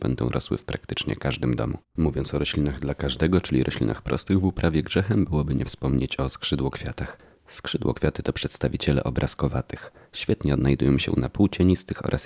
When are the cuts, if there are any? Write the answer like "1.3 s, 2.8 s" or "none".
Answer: none